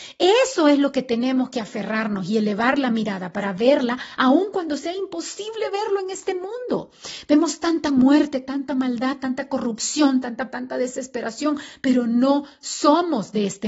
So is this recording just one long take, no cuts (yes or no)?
no